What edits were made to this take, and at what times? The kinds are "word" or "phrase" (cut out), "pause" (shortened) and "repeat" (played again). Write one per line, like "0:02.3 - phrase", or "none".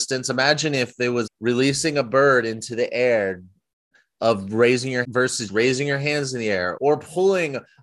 0:01.3 - word
0:05.0 - word
0:05.5 - word
0:06.8 - word